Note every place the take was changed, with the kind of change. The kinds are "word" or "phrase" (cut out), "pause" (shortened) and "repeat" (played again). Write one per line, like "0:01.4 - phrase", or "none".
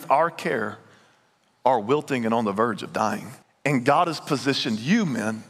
0:03.4 - pause

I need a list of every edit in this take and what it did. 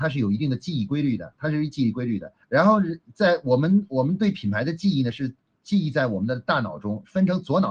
0:02.4 - pause

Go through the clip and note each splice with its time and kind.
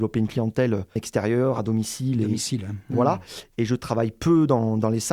0:01.0 - word

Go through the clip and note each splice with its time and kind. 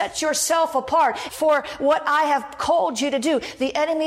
0:01.3 - phrase

